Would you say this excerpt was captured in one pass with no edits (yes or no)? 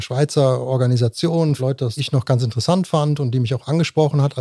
no